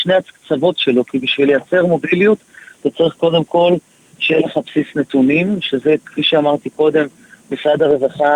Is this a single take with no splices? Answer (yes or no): yes